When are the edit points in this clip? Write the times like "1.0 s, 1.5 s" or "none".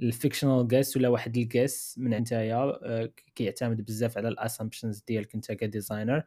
2.2 s